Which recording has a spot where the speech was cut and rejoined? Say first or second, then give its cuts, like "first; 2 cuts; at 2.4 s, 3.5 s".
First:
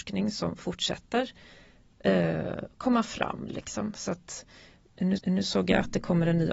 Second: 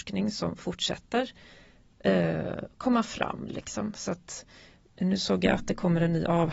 first; 1 cut; at 5.2 s